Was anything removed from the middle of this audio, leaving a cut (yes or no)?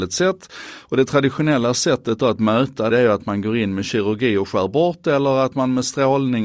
yes